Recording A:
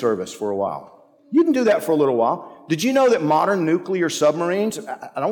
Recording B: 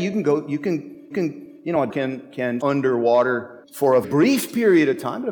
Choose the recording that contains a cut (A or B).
B